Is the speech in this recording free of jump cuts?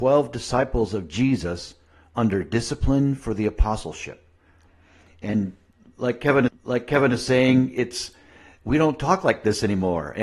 no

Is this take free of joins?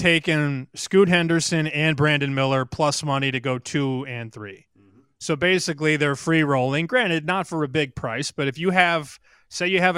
yes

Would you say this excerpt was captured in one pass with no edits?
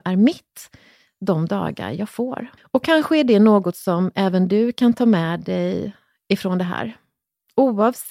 no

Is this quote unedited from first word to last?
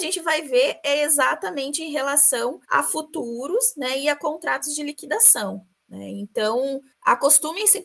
no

